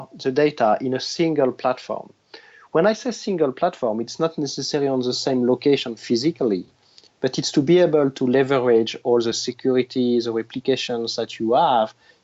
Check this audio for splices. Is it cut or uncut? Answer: uncut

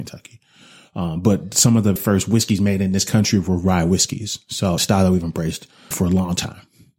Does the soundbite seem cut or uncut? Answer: cut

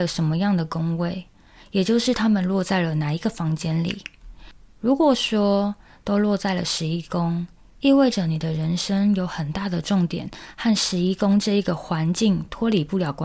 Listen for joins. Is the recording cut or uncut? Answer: uncut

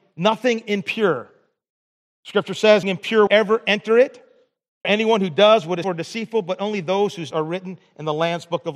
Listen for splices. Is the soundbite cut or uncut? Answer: cut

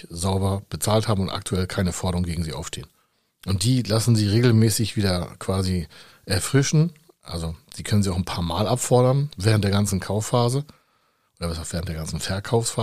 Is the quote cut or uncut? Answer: uncut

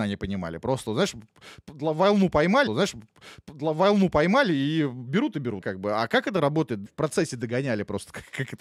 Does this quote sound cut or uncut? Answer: cut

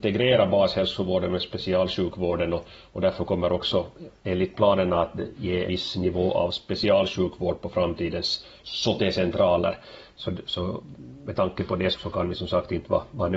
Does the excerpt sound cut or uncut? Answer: cut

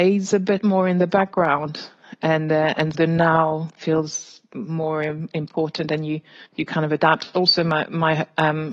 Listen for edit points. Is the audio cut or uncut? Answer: cut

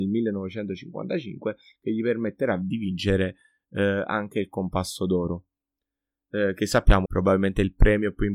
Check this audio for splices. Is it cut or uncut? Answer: cut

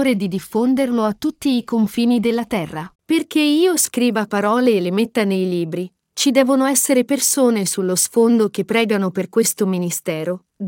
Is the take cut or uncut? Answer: cut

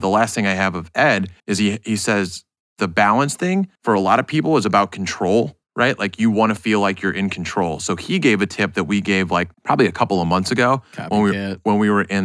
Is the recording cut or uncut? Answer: cut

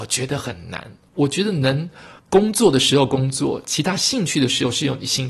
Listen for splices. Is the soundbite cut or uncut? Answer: cut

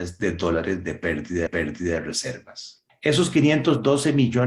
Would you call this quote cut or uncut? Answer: cut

